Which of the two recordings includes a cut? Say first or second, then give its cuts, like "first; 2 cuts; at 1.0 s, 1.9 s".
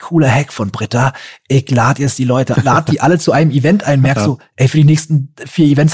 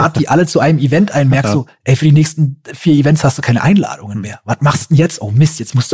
first; 1 cut; at 2.6 s